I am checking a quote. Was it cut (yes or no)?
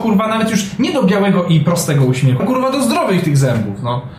yes